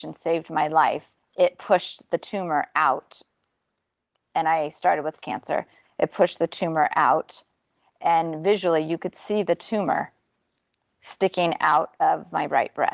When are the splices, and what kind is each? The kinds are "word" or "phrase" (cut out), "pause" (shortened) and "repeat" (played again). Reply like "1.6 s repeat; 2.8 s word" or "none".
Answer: 1.2 s word; 5.2 s word